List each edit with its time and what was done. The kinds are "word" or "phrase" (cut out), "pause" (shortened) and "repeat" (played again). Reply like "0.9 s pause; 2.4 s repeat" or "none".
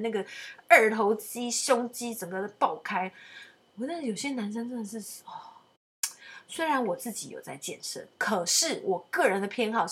none